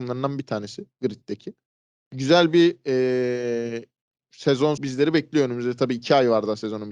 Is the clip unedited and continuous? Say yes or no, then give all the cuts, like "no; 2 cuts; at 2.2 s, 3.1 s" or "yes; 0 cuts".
no; 2 cuts; at 1.7 s, 4.8 s